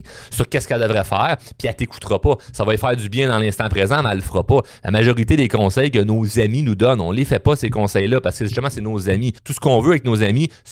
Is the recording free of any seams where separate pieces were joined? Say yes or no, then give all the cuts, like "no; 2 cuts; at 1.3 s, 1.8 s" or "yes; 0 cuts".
no; 1 cut; at 9.4 s